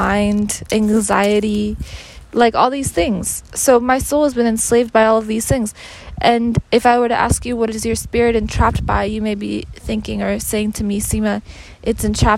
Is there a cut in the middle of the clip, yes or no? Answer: no